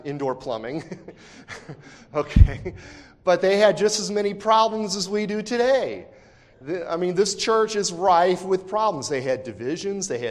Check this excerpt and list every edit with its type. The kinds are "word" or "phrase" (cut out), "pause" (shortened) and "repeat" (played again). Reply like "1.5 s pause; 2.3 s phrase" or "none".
none

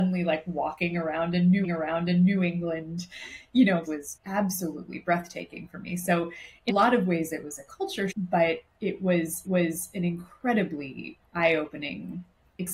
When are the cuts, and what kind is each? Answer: 1.6 s repeat; 3.8 s word; 4.2 s word; 6.7 s word; 8.1 s word; 9.4 s repeat

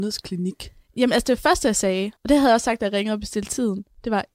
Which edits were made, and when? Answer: 2.2 s pause

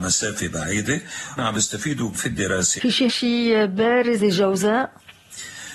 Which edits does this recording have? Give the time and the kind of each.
1.4 s word; 2.1 s word; 2.8 s word; 3.1 s word; 4.2 s word

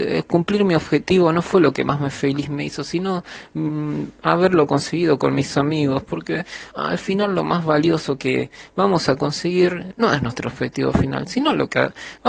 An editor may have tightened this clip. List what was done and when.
6.7 s word

